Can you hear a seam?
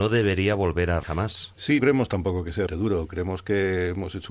yes; 3 cuts; at 1.0 s, 1.8 s, 2.7 s

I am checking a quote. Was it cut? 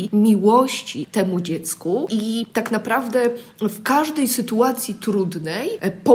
no; 0 cuts

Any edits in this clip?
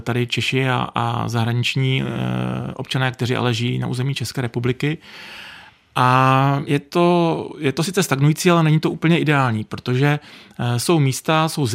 yes; 1 cut; at 6.7 s

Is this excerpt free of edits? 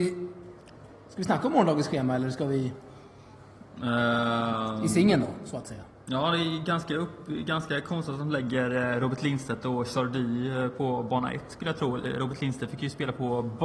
yes; 0 cuts

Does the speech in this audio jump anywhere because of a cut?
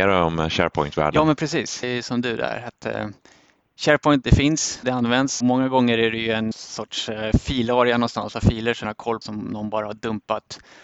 yes; 8 cuts; at 1.8 s, 4.2 s, 4.8 s, 5.4 s, 6.5 s, 8.3 s, 8.8 s, 9.2 s

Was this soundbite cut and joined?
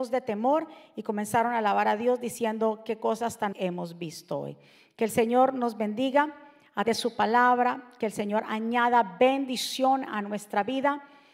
yes; 2 cuts; at 3.5 s, 6.9 s

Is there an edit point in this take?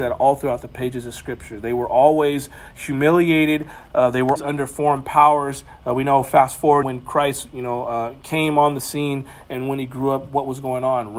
yes; 2 cuts; at 4.4 s, 6.8 s

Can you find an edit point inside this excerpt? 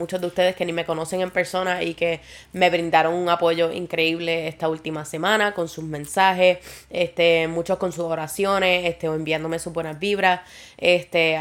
no; 0 cuts

